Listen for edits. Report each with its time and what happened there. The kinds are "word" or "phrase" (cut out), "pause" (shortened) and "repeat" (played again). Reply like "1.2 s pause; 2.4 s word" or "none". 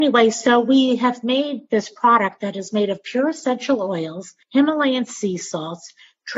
4.4 s pause